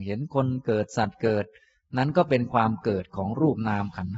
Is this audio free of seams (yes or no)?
yes